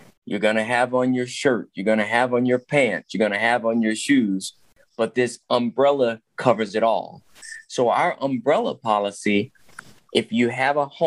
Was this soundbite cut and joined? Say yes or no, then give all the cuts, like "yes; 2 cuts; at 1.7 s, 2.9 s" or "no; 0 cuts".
no; 0 cuts